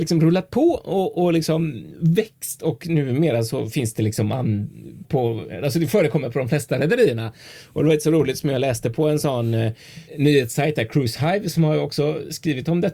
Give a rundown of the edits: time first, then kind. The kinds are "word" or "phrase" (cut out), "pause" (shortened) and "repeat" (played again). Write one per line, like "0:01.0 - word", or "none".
0:05.0 - word
0:10.1 - pause